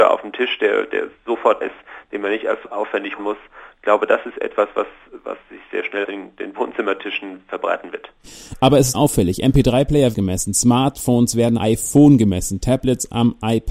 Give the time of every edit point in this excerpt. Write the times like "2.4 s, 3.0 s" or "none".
1.6 s, 3.2 s, 6.0 s, 8.9 s, 10.1 s, 11.6 s